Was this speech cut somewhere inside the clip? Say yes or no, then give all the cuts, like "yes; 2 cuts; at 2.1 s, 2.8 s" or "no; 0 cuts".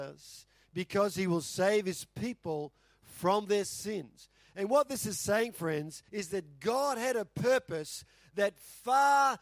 yes; 1 cut; at 6.1 s